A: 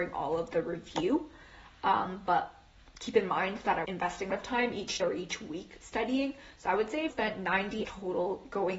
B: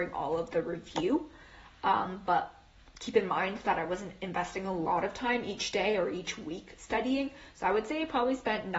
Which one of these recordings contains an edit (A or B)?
A